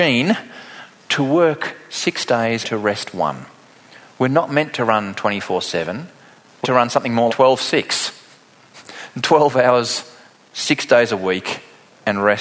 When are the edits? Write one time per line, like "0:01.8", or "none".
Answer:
0:02.6
0:06.6
0:07.3